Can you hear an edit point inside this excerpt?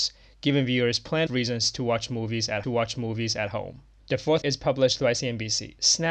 yes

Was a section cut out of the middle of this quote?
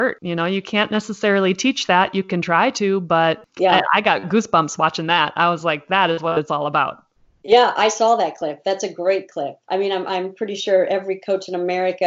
no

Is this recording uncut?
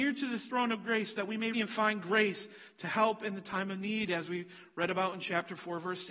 no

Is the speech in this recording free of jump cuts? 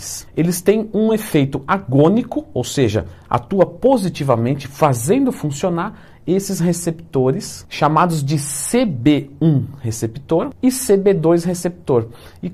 yes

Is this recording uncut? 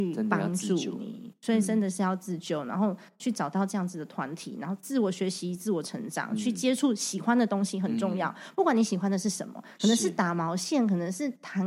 yes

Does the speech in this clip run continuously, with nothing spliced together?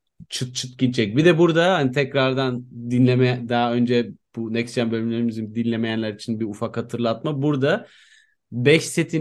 yes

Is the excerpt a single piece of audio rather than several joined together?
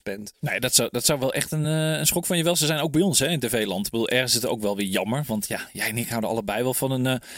yes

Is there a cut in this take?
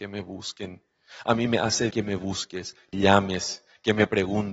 yes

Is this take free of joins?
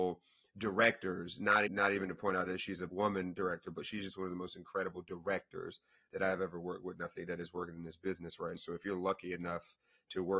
no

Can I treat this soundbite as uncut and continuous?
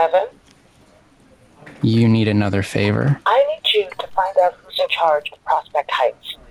yes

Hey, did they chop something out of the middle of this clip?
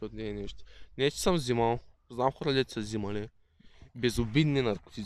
no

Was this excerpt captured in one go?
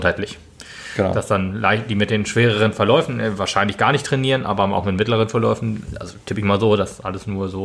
yes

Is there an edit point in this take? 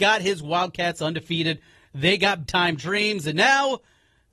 yes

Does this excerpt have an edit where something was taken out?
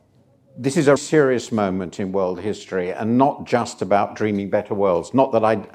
yes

